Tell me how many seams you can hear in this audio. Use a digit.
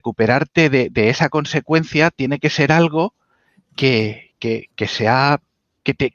0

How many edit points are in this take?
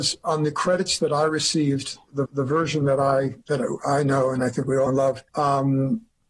4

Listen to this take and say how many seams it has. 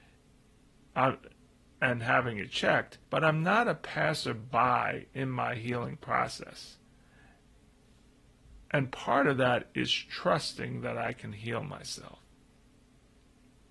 2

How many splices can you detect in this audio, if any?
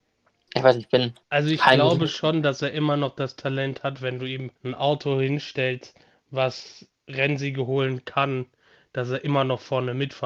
2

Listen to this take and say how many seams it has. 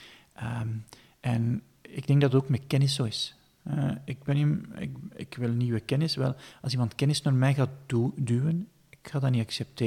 0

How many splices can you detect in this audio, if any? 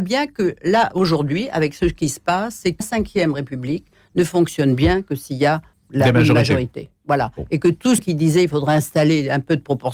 3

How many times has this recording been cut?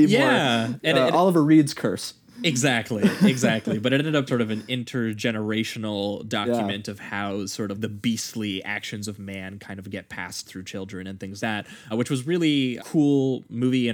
6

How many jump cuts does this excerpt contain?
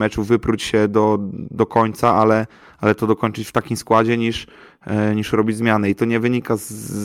0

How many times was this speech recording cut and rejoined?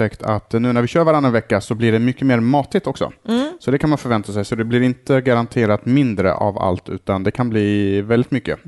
0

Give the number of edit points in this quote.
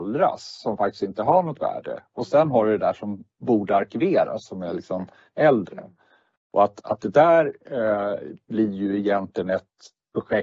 0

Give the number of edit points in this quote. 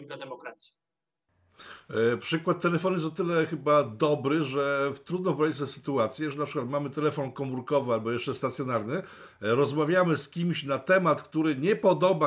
0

